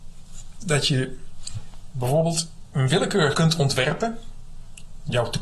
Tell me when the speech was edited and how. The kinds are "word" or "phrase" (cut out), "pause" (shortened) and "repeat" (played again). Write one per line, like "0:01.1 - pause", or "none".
0:03.3 - phrase